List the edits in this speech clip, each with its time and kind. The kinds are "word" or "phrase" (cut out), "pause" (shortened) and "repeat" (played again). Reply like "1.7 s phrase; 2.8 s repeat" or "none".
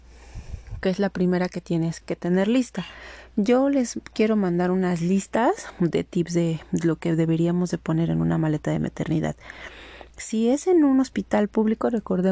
2.0 s word